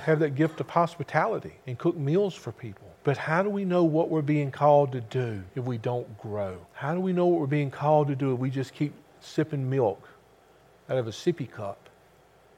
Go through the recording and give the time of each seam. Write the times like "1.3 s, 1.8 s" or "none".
1.6 s, 2.9 s, 5.5 s, 6.6 s